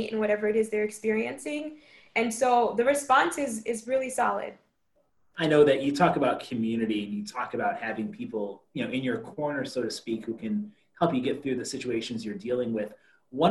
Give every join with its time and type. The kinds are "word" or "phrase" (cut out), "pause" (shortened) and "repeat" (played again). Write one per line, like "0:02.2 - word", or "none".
none